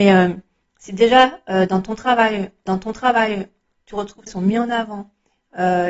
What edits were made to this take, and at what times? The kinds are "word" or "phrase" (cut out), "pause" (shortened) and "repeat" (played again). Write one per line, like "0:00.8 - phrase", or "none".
0:02.7 - repeat
0:04.3 - phrase